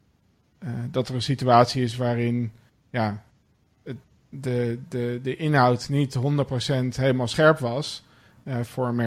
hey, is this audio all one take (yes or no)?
yes